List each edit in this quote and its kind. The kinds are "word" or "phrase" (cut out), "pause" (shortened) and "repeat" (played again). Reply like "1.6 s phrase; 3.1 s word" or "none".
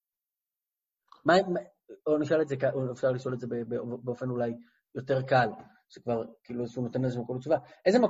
none